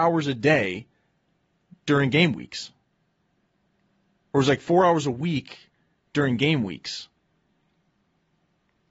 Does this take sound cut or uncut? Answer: uncut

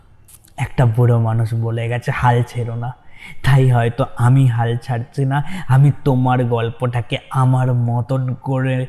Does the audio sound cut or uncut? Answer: uncut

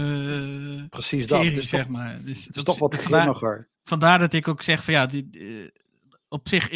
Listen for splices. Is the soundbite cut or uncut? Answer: cut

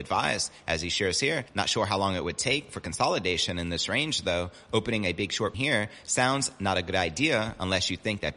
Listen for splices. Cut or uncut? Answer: cut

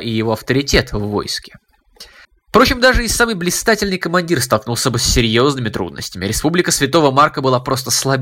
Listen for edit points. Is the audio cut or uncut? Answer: cut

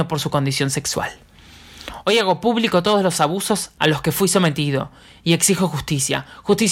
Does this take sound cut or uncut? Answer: uncut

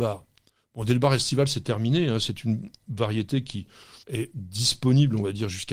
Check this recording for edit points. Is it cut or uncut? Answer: cut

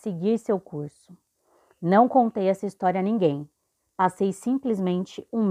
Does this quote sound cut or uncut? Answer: uncut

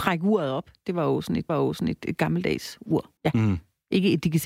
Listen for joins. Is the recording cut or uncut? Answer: cut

